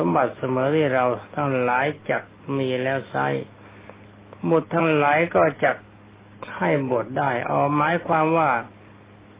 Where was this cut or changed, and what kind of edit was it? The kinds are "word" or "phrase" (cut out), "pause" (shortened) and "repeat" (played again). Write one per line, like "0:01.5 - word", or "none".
none